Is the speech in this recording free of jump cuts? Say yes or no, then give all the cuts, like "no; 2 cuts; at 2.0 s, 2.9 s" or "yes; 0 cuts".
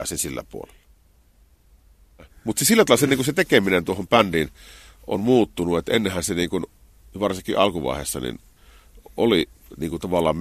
yes; 0 cuts